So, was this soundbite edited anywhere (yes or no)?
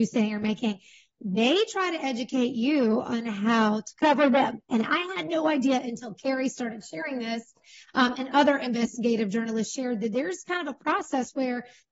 no